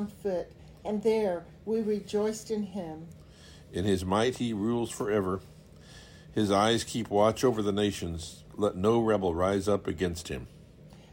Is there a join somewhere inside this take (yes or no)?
no